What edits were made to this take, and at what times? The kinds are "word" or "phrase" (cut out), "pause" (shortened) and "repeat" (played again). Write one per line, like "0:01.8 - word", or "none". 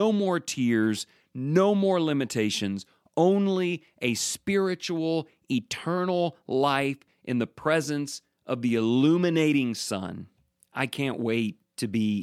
none